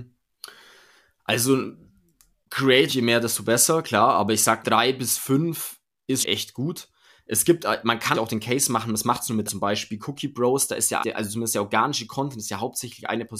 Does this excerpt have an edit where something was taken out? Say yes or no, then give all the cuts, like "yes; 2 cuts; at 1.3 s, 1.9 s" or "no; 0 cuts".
yes; 6 cuts; at 2.9 s, 4.6 s, 6.2 s, 8.1 s, 9.5 s, 11.0 s